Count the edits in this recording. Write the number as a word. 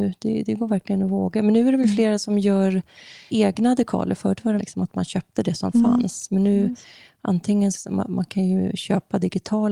three